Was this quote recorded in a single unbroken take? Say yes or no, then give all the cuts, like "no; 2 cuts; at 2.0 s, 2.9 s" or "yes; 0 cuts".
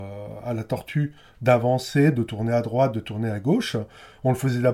yes; 0 cuts